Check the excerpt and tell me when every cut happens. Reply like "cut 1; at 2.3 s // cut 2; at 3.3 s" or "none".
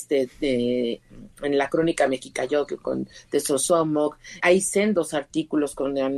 cut 1; at 4.4 s